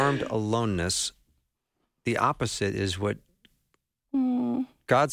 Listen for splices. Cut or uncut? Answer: uncut